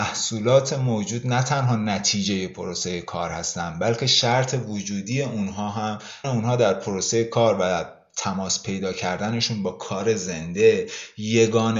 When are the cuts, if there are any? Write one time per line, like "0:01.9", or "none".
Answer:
0:06.2